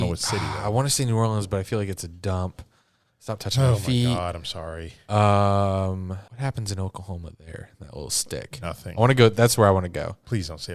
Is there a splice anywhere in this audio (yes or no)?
yes